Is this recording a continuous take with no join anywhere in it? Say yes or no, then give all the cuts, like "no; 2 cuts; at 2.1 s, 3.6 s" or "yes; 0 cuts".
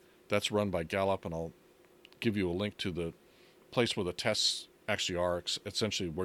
yes; 0 cuts